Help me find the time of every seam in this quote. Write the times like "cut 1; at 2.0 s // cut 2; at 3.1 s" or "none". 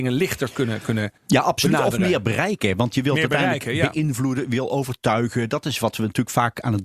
cut 1; at 1.2 s